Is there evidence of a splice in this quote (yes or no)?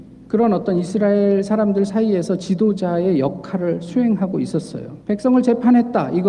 yes